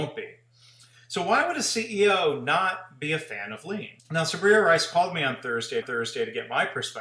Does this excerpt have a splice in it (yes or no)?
yes